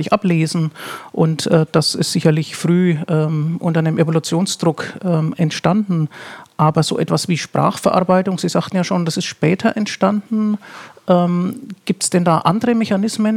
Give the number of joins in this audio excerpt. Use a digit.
0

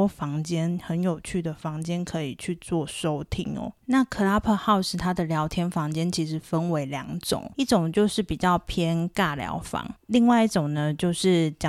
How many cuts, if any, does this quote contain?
0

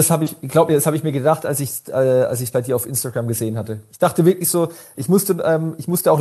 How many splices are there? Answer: 0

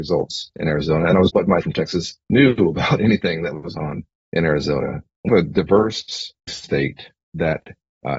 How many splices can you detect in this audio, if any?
6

